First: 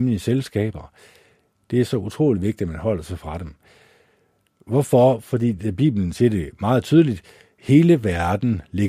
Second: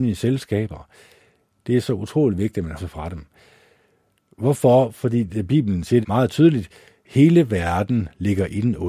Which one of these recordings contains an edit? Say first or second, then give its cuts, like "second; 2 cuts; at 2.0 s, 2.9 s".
second; 2 cuts; at 2.8 s, 6.0 s